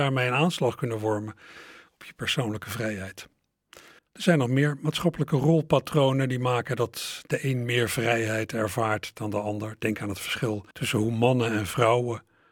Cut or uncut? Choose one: cut